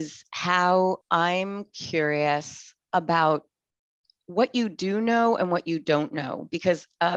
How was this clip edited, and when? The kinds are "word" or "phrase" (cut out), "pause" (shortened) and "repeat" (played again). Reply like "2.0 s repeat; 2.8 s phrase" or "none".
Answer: 1.0 s pause; 2.9 s pause